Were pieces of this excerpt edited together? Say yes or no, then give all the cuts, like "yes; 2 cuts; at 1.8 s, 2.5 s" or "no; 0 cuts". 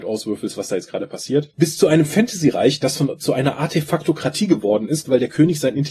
no; 0 cuts